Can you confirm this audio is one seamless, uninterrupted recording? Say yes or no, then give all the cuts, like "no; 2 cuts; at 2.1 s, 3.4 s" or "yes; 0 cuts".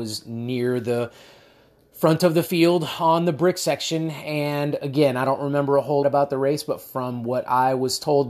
no; 1 cut; at 6.0 s